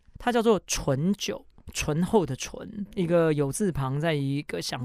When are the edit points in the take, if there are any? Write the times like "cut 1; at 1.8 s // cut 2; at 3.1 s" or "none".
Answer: cut 1; at 2.9 s